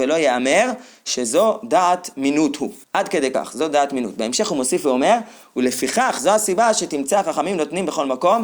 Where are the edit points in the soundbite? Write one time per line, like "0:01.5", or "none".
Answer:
0:02.8